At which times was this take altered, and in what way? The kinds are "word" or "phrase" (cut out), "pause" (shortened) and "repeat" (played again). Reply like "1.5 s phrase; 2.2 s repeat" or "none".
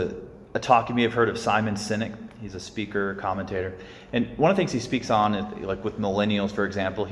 none